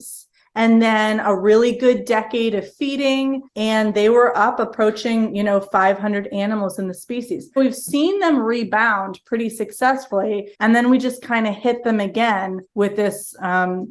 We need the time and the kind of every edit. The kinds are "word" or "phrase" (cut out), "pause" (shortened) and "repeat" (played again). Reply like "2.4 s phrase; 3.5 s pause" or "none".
3.5 s pause; 7.6 s word; 10.5 s pause; 12.7 s pause